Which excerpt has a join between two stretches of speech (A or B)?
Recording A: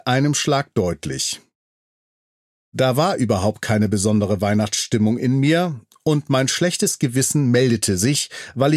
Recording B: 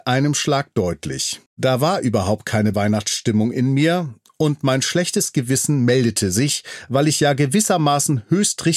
B